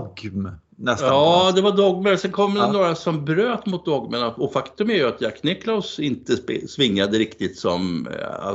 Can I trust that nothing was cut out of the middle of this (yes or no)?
yes